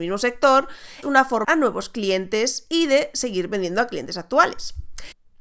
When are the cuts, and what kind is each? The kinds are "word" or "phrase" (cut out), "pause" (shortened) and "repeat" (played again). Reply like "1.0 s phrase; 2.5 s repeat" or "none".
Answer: 1.0 s word; 1.4 s phrase